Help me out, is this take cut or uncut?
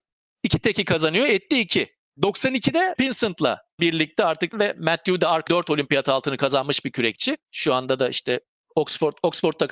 cut